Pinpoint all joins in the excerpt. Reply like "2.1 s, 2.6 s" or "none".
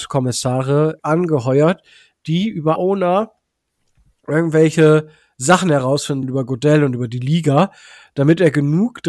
1.0 s, 2.8 s, 6.2 s